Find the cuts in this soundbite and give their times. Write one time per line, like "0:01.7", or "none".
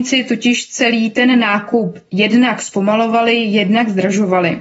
none